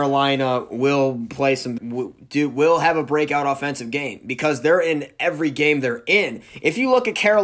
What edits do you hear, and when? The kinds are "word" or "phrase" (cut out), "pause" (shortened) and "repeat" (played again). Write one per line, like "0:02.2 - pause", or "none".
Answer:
0:01.8 - word